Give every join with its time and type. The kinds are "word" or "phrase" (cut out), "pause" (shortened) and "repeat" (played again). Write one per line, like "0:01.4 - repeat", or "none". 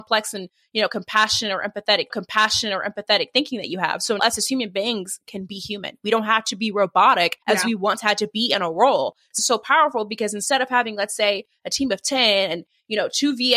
0:02.1 - repeat
0:04.2 - word
0:07.4 - pause
0:09.4 - phrase